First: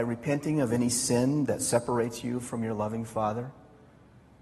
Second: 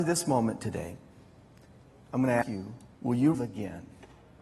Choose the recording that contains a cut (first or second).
second